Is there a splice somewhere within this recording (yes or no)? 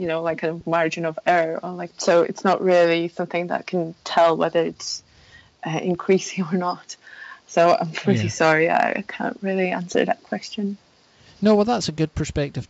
no